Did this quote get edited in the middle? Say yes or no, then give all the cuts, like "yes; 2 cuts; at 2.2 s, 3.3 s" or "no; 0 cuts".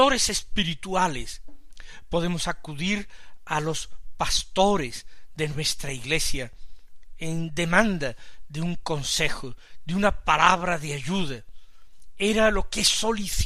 no; 0 cuts